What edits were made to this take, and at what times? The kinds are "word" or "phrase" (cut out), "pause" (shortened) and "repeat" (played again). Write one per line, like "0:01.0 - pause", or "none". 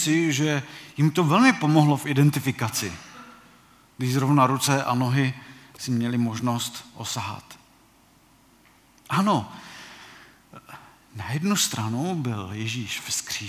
none